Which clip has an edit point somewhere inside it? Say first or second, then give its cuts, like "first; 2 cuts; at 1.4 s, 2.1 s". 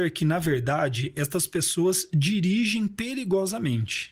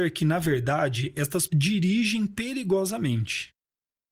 second; 1 cut; at 1.5 s